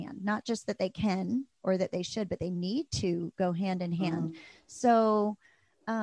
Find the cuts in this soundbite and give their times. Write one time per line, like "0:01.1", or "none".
none